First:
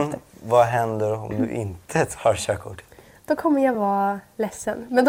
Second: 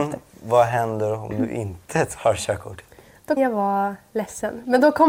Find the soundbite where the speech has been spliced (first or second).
second